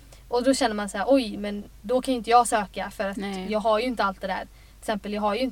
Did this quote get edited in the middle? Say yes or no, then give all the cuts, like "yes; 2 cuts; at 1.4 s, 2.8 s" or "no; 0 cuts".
no; 0 cuts